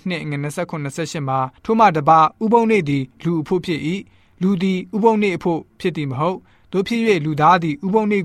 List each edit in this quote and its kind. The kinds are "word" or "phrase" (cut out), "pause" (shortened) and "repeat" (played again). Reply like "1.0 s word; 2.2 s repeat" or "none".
1.6 s pause